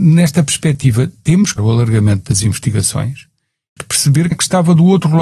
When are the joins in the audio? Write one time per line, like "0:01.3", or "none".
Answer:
0:01.6
0:03.8
0:04.3